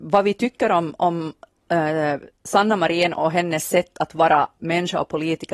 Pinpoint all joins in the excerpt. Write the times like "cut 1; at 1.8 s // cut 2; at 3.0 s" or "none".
cut 1; at 2.3 s